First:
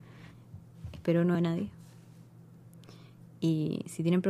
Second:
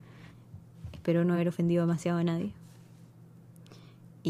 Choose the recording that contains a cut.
first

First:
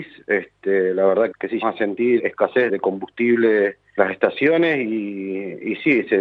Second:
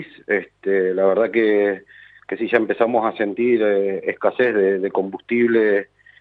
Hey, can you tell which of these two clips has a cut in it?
first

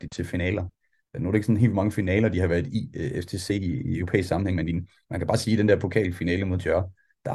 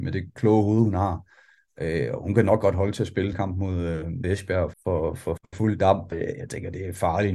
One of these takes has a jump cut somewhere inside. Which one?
second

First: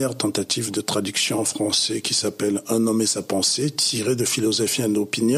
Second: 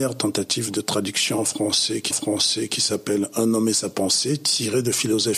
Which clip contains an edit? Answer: second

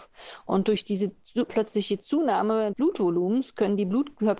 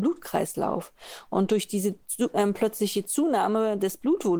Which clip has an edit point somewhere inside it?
first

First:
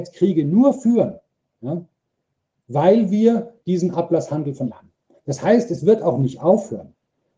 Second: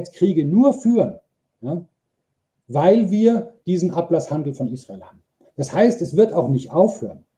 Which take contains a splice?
first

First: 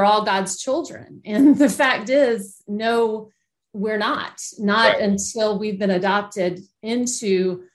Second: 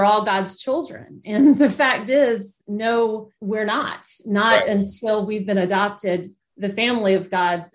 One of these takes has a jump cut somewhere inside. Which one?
second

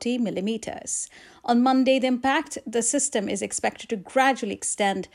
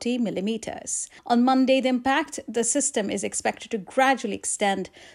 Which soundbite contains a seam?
second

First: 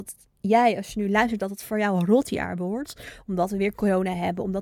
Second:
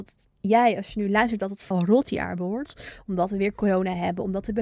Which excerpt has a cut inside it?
second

